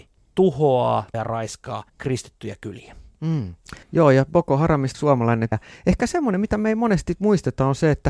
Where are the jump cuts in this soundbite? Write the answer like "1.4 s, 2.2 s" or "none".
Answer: 1.1 s, 1.9 s, 3.8 s, 4.9 s, 5.5 s